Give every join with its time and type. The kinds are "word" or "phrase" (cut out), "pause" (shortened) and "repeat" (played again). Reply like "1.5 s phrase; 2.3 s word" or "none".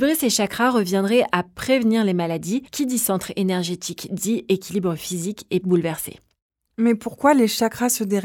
2.7 s word; 4.1 s word; 5.6 s word